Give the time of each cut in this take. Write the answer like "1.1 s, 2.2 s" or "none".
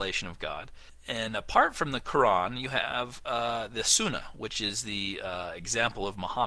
none